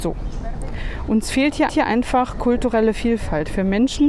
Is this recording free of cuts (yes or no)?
no